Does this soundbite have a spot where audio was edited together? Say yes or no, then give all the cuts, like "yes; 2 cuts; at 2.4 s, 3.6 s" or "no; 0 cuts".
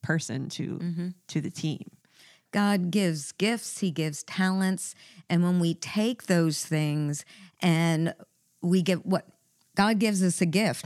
no; 0 cuts